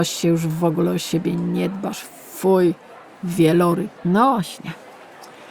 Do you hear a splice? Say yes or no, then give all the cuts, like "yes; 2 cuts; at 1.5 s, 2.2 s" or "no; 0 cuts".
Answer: yes; 1 cut; at 4.0 s